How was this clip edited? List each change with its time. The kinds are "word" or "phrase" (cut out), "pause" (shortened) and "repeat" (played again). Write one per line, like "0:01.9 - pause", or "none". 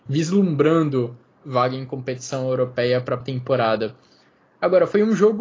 0:01.4 - word
0:03.2 - word